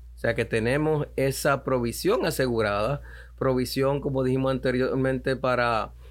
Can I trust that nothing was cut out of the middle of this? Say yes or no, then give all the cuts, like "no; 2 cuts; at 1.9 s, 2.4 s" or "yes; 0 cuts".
yes; 0 cuts